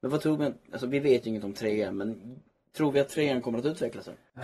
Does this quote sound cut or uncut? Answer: uncut